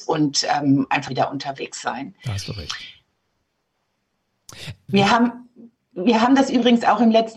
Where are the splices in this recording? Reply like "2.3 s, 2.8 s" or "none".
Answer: 1.1 s